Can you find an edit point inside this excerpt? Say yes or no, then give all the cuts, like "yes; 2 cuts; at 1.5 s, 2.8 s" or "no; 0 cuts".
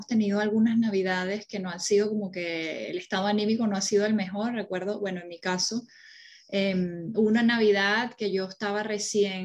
no; 0 cuts